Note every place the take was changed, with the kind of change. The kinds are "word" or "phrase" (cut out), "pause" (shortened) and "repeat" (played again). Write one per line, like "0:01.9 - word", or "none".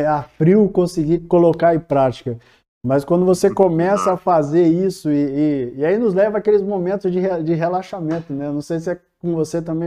none